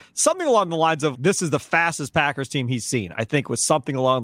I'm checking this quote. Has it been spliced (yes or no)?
yes